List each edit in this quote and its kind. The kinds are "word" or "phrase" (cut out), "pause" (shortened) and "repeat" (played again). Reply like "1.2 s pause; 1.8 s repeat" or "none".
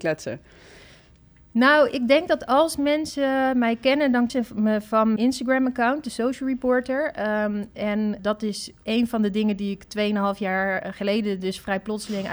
4.3 s word; 5.2 s word; 8.2 s word; 8.8 s word